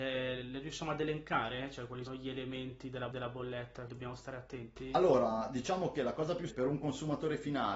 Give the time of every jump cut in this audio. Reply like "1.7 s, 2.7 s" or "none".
2.1 s, 3.1 s, 3.9 s, 6.5 s